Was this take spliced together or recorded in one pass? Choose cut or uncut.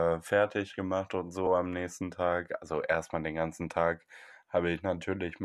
uncut